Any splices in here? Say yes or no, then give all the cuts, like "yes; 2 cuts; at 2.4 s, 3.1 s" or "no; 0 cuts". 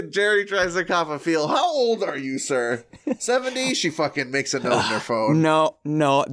no; 0 cuts